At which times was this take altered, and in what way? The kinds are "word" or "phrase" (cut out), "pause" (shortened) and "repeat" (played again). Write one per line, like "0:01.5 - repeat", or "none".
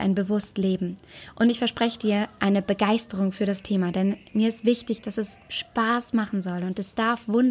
none

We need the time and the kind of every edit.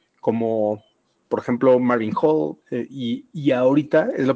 0:02.6 - pause

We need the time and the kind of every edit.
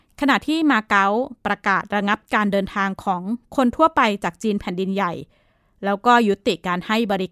none

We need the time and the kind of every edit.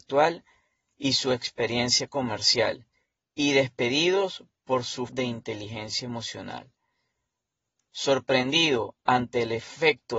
0:05.1 - word

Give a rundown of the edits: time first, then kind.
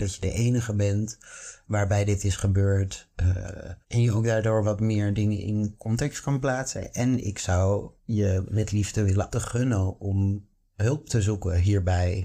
0:03.8 - pause
0:08.0 - pause
0:09.3 - phrase

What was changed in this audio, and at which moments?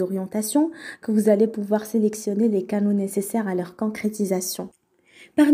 none

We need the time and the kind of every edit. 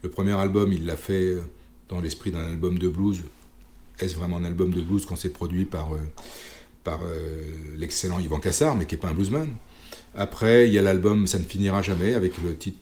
none

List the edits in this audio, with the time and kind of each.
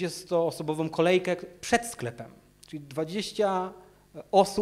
none

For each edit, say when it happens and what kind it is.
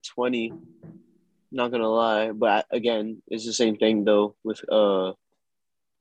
none

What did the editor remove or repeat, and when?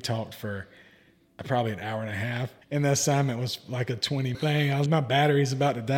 0:02.6 - pause
0:04.3 - phrase
0:04.9 - word

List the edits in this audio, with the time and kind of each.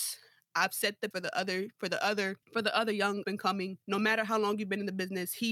0:01.1 - word
0:02.4 - pause
0:03.2 - word
0:03.8 - pause

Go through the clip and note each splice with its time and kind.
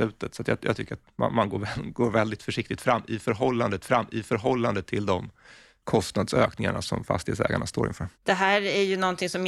0:03.8 - repeat
0:06.8 - word
0:08.1 - pause

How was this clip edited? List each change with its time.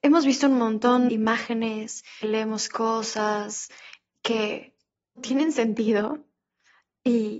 0:01.1 - word
0:02.2 - word
0:05.2 - word

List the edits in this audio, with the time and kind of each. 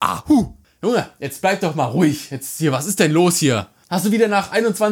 none

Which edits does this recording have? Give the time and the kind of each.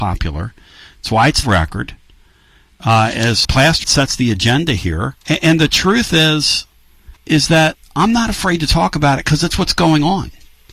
0:01.4 - phrase
0:03.4 - word
0:03.8 - phrase
0:05.2 - pause
0:07.2 - pause

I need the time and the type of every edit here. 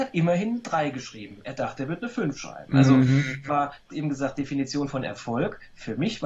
0:03.5 - word
0:03.9 - word

